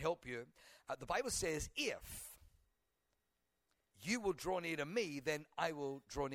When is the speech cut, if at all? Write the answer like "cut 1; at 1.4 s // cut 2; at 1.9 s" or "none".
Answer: none